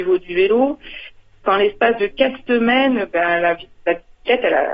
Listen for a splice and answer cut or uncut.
uncut